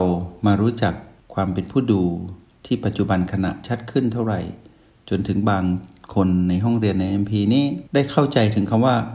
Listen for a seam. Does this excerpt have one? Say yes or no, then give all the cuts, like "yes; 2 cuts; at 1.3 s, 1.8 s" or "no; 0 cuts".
no; 0 cuts